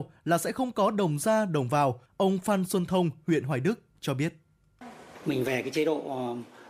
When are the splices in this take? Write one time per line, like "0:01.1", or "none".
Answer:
0:02.1

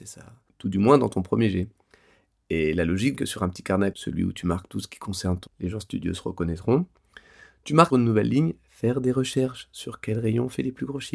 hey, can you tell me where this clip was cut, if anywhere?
0:03.2
0:03.9
0:05.5
0:07.9

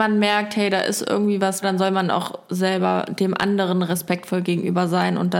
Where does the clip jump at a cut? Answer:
0:01.6

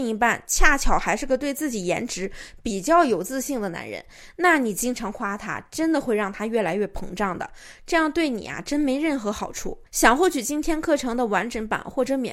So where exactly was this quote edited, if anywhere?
none

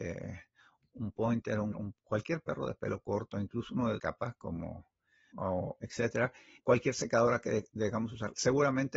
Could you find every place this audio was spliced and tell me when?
0:01.7
0:04.0
0:05.3
0:06.6

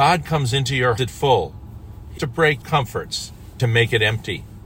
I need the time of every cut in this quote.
0:01.0
0:02.2
0:02.6
0:03.6

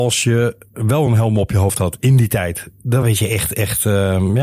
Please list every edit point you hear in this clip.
none

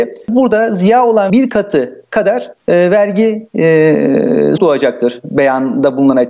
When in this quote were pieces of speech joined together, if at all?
0:01.3
0:02.6
0:04.6

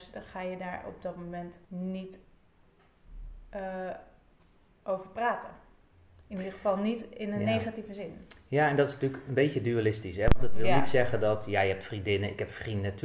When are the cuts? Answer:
0:01.6

